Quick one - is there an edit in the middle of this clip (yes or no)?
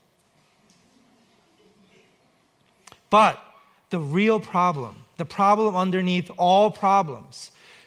no